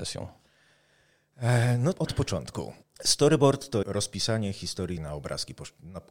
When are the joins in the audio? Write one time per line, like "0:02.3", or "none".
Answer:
0:01.9
0:02.8
0:03.8
0:05.0